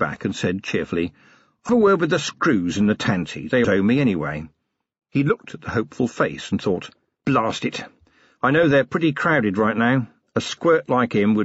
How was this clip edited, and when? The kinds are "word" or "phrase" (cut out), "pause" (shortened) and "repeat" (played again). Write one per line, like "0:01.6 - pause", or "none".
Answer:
0:01.7 - word
0:03.6 - word